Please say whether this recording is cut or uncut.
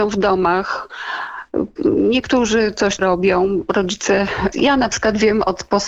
cut